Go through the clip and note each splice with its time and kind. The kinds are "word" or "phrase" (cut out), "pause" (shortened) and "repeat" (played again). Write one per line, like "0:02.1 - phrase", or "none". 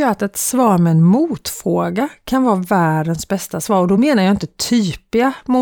none